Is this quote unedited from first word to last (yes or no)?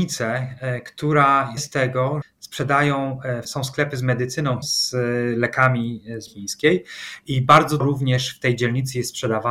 no